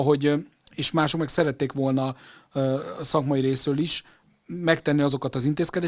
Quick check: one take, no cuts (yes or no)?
yes